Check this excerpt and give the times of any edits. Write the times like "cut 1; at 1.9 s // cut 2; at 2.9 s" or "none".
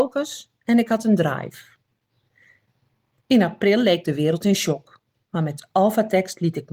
none